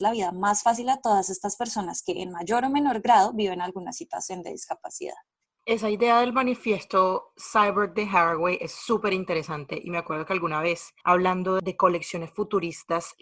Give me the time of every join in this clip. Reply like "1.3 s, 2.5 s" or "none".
none